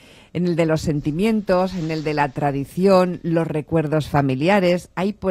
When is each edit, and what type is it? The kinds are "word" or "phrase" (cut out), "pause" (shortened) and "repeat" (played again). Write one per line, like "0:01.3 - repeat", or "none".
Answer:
none